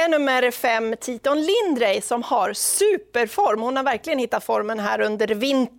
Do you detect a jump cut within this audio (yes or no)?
no